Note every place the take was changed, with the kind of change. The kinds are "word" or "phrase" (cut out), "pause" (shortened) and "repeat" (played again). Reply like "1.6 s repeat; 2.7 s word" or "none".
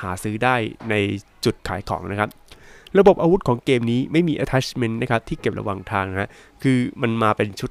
1.6 s pause